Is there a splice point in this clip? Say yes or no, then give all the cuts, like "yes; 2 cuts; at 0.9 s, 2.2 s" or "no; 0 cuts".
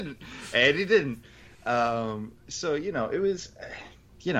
no; 0 cuts